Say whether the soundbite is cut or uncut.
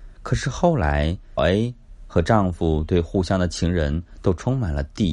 cut